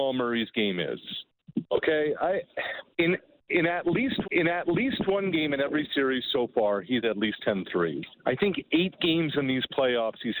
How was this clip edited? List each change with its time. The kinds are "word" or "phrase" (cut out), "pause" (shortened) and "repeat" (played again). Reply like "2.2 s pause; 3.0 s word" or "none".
2.9 s pause; 4.2 s repeat; 7.0 s word; 8.2 s pause